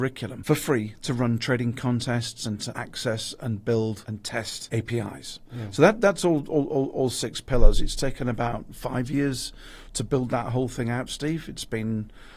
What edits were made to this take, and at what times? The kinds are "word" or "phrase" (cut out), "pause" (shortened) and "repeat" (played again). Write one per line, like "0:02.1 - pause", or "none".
none